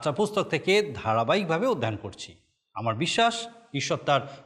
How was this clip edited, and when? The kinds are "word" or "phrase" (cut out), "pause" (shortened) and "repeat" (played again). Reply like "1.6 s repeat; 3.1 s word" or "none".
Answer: none